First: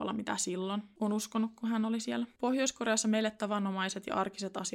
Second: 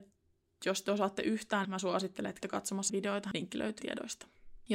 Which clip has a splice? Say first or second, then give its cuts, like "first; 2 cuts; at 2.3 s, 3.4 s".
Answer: second; 4 cuts; at 1.6 s, 2.4 s, 2.9 s, 3.8 s